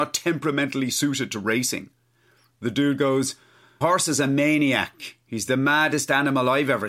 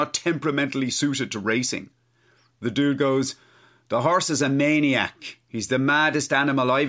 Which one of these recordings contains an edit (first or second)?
first